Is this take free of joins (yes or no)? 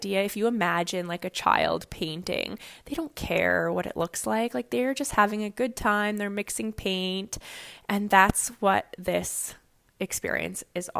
yes